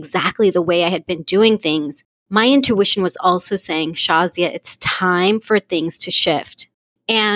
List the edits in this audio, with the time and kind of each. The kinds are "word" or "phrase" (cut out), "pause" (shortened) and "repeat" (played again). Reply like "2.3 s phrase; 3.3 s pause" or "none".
none